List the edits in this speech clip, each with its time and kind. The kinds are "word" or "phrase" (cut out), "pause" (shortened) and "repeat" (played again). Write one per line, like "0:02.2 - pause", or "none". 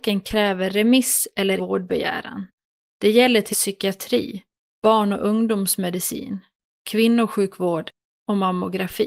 0:01.6 - word
0:03.5 - word